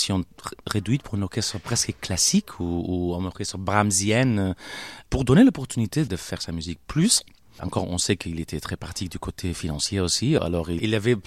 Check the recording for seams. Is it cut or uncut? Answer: uncut